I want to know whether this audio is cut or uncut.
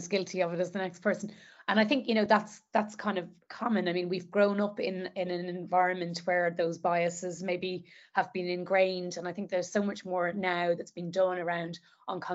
uncut